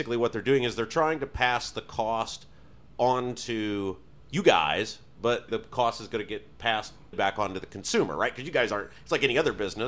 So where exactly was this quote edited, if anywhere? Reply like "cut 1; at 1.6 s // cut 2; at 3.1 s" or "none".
cut 1; at 5.5 s // cut 2; at 7.1 s